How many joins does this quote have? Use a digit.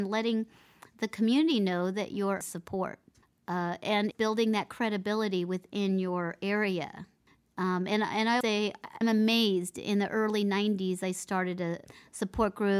6